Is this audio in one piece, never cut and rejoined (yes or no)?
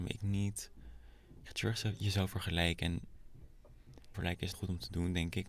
no